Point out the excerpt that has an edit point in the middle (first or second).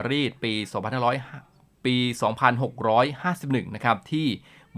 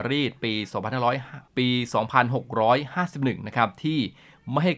second